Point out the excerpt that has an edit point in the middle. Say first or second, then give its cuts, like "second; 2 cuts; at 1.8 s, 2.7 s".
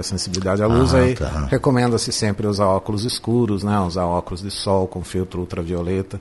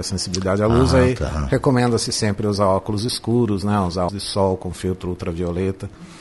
second; 1 cut; at 4.1 s